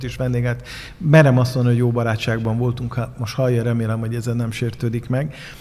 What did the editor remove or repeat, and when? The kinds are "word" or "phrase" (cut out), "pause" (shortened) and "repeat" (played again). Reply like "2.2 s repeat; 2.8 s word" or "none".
none